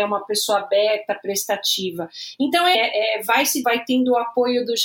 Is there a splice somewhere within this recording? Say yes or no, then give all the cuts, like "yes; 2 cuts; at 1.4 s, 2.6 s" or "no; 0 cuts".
yes; 2 cuts; at 2.7 s, 3.6 s